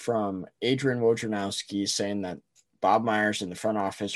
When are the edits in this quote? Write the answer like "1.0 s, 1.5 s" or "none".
none